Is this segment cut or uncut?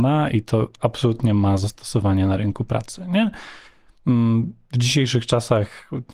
uncut